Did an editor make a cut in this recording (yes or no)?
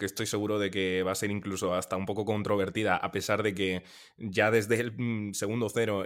no